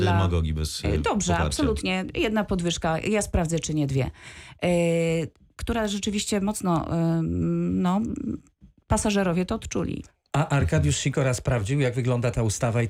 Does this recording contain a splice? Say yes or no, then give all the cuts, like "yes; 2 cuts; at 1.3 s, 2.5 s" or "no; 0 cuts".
no; 0 cuts